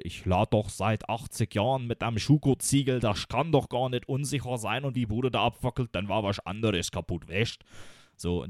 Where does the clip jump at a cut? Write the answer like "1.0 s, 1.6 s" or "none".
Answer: 4.9 s